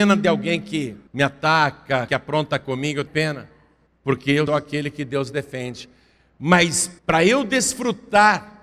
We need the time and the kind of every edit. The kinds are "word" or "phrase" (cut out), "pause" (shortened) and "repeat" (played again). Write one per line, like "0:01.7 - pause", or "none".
0:01.1 - pause
0:02.1 - phrase
0:03.1 - word
0:03.9 - pause
0:04.5 - word
0:07.0 - pause